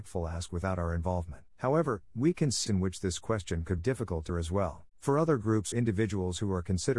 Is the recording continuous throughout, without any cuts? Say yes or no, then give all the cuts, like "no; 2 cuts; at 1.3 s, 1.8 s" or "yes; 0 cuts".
no; 6 cuts; at 1.5 s, 2.7 s, 3.8 s, 4.3 s, 4.9 s, 5.7 s